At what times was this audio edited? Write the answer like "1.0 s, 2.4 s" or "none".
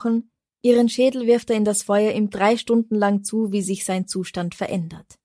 2.3 s